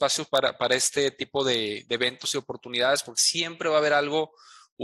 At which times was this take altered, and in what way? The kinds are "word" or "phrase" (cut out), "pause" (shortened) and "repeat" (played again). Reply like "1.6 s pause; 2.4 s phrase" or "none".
none